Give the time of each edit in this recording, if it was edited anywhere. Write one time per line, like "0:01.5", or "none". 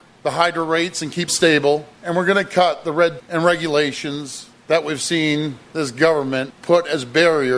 0:01.3
0:03.2